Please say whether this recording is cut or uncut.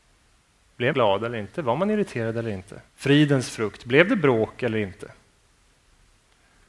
cut